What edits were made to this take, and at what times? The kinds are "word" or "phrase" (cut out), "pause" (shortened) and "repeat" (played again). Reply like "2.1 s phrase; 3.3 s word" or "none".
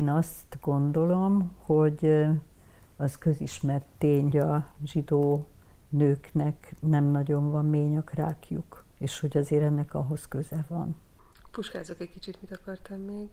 4.3 s word; 8.9 s pause